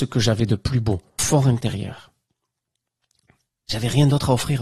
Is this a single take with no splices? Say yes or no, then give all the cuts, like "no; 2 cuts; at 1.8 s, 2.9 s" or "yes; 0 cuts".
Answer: no; 1 cut; at 1.2 s